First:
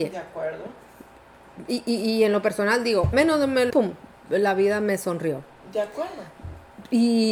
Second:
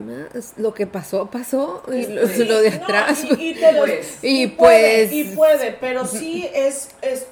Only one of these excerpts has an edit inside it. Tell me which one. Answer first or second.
first